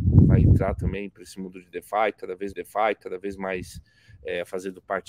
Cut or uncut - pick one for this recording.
cut